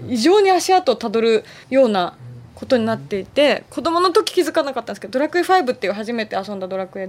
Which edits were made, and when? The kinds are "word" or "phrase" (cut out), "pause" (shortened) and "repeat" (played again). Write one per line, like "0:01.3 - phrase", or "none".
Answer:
0:01.6 - pause